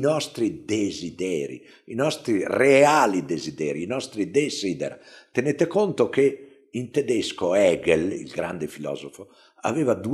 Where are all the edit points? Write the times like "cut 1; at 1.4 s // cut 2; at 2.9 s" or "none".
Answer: none